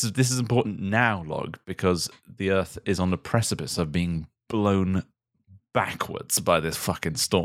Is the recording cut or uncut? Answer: uncut